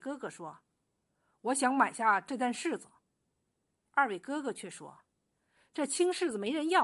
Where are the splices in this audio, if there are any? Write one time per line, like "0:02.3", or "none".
none